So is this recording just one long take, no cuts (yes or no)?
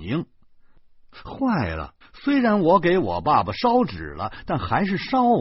no